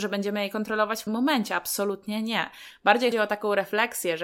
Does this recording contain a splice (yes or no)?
yes